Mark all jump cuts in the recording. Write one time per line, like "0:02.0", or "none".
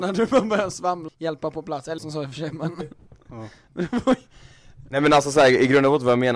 0:01.1
0:02.0